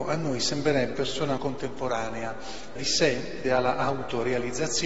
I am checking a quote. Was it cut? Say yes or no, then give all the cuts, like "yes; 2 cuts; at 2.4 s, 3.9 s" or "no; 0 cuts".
yes; 4 cuts; at 0.9 s, 1.4 s, 2.8 s, 3.4 s